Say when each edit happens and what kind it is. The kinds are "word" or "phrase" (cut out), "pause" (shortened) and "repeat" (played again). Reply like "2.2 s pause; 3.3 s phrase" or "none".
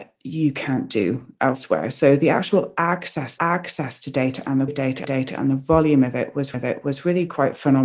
3.4 s repeat; 4.7 s word; 5.0 s repeat; 6.5 s repeat